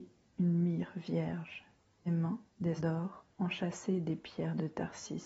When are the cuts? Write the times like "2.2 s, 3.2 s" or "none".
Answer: 2.1 s, 2.8 s, 3.3 s